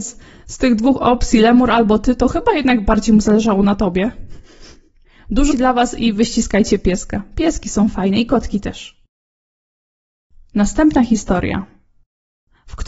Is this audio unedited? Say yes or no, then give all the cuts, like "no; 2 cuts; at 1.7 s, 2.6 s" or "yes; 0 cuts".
no; 1 cut; at 5.5 s